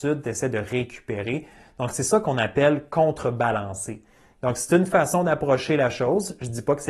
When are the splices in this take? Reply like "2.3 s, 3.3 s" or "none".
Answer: none